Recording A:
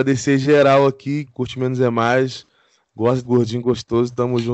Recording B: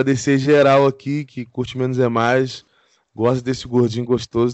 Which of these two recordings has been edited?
A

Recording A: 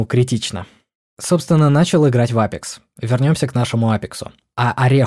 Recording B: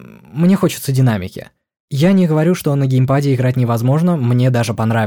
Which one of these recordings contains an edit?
A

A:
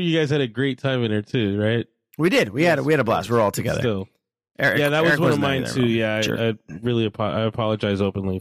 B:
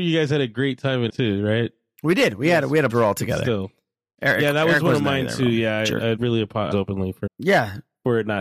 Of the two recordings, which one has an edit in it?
B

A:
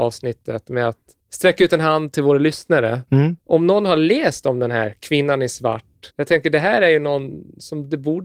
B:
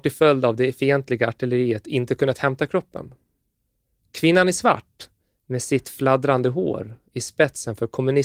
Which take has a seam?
A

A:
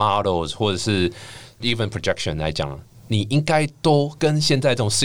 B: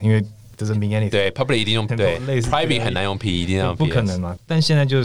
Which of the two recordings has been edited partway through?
B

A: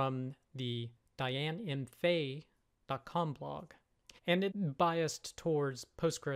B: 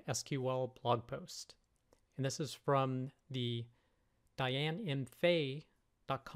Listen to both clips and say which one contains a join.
A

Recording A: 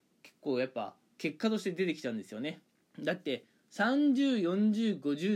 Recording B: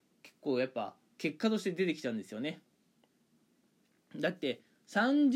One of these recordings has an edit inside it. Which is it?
A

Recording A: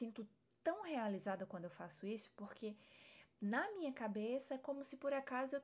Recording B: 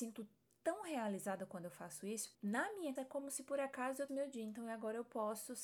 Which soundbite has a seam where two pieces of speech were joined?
B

